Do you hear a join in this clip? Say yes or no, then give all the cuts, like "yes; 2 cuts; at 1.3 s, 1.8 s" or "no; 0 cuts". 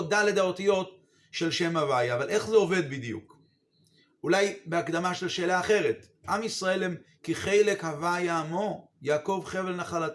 no; 0 cuts